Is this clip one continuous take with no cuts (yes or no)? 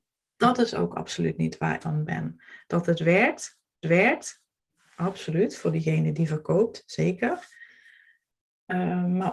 no